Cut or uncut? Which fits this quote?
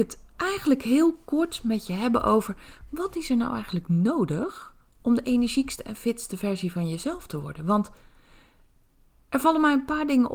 uncut